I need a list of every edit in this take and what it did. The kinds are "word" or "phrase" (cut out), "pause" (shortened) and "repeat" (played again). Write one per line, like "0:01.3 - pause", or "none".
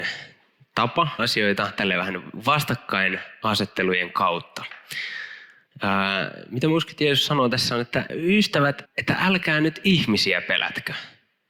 0:01.2 - word
0:08.1 - word
0:08.8 - word